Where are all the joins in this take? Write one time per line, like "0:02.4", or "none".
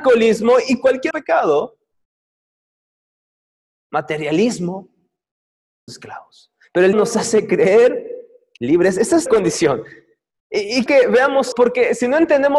0:01.1
0:05.9
0:06.9
0:08.6
0:09.3
0:10.9
0:11.5